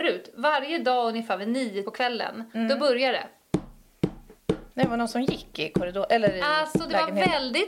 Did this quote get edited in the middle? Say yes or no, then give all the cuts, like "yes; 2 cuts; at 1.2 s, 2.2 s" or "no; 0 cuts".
yes; 2 cuts; at 1.8 s, 4.7 s